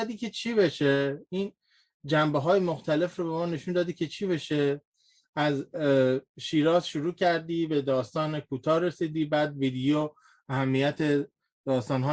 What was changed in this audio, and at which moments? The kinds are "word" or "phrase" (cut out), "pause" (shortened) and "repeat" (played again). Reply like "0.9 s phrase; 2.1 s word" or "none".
none